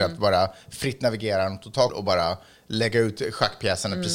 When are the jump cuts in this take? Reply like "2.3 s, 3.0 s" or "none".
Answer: 1.9 s